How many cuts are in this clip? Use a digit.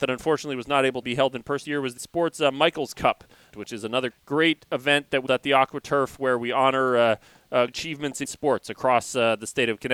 8